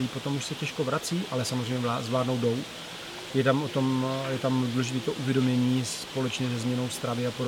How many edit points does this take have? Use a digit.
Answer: 0